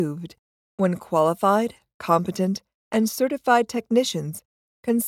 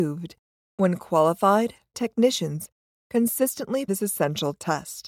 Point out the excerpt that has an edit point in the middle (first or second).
second